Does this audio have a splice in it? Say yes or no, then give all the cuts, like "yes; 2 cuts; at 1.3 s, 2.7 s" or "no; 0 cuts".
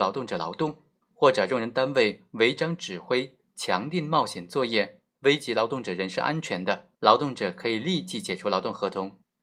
yes; 2 cuts; at 1.0 s, 6.9 s